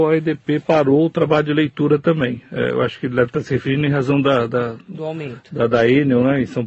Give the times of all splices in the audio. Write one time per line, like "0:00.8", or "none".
none